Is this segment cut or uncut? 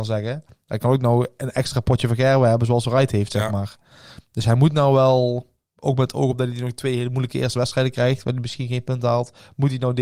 uncut